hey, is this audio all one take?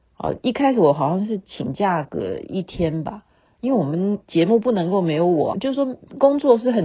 no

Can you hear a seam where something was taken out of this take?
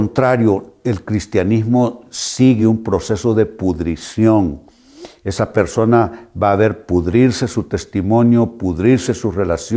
no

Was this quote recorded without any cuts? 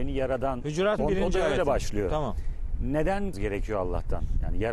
no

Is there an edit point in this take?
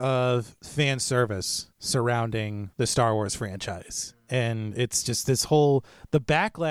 no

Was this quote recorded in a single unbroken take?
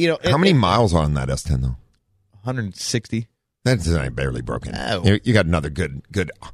yes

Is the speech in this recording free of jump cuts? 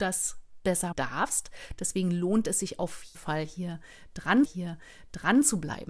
no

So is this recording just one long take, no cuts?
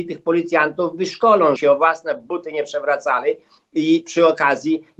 no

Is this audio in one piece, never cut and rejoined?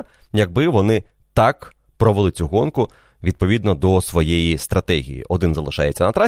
yes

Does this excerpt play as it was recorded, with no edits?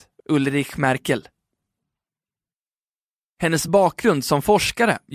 yes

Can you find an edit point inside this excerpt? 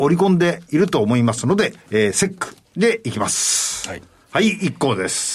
yes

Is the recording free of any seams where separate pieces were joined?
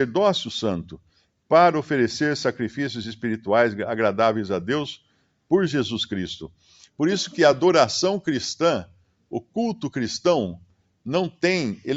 yes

